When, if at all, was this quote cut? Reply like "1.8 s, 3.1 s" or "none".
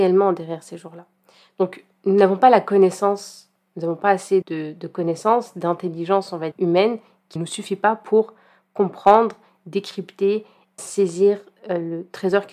4.4 s, 6.5 s, 7.4 s, 10.8 s